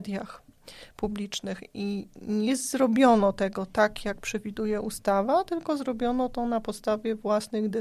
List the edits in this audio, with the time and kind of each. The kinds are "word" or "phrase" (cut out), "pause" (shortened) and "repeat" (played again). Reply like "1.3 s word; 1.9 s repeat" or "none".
none